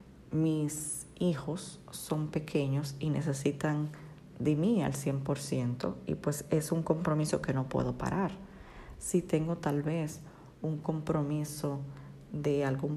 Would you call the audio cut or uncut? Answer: uncut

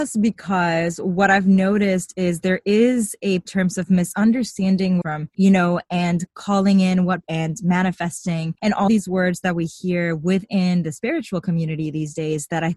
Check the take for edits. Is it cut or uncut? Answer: cut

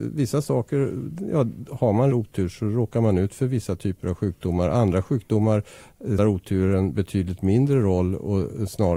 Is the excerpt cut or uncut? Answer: cut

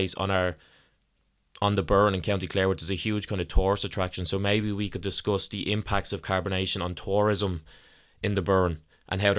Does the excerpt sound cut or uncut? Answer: uncut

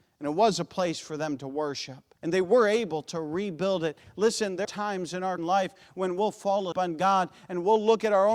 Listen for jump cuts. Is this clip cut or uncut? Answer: cut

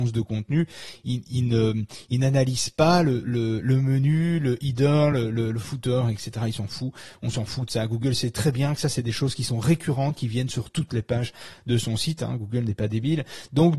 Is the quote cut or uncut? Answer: uncut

